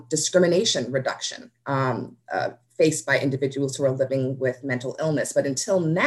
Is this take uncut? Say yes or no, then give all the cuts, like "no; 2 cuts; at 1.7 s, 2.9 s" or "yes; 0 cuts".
yes; 0 cuts